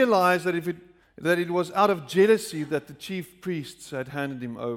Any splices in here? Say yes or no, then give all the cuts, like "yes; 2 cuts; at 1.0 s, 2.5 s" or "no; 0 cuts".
yes; 1 cut; at 1.0 s